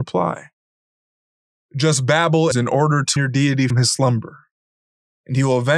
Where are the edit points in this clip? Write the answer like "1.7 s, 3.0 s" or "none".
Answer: 2.5 s, 3.2 s, 3.7 s